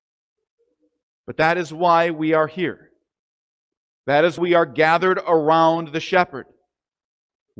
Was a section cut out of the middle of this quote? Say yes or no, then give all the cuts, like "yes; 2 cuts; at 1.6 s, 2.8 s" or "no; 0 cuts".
yes; 1 cut; at 4.4 s